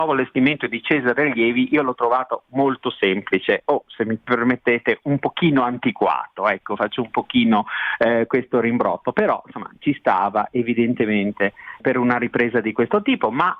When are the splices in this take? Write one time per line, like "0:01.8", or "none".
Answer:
0:11.8